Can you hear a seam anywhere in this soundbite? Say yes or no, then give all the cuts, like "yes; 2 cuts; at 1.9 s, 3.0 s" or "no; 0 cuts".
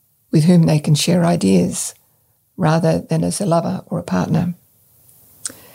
no; 0 cuts